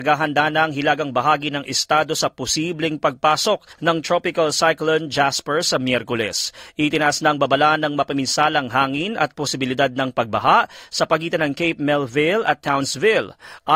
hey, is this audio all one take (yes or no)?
no